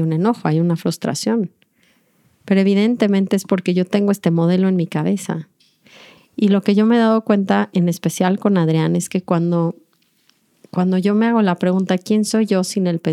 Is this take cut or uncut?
uncut